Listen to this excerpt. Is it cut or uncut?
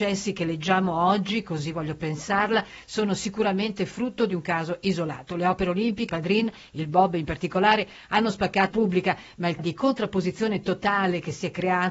cut